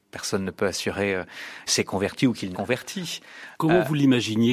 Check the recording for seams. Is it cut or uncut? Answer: cut